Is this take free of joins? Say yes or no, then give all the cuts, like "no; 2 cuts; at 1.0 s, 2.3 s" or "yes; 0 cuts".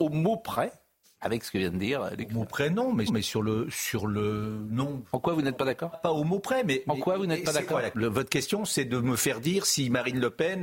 no; 4 cuts; at 1.0 s, 3.1 s, 5.9 s, 7.9 s